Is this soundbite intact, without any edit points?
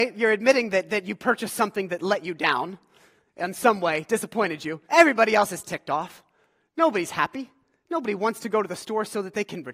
no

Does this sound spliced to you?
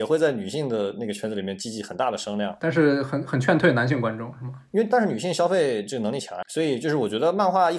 yes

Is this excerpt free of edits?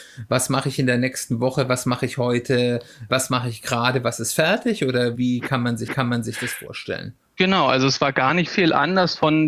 no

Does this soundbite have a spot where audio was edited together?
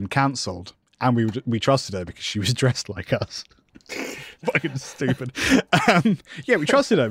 yes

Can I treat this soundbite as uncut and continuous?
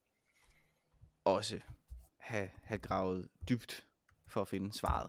yes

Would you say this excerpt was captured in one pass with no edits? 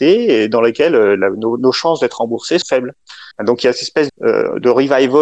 no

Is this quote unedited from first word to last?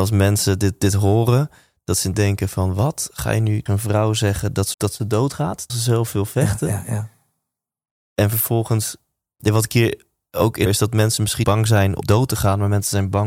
no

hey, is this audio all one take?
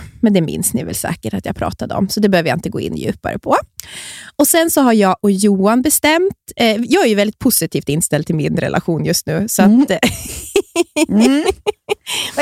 yes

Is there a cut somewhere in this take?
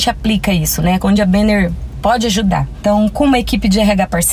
no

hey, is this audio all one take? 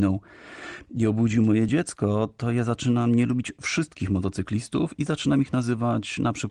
yes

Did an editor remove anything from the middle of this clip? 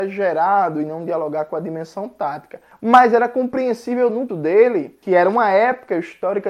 yes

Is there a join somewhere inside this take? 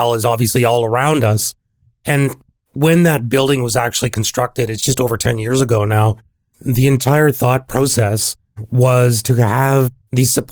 no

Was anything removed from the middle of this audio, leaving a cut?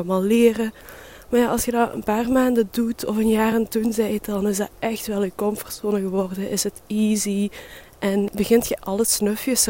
no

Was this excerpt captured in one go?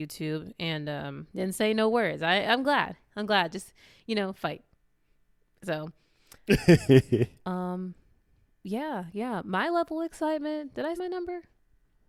no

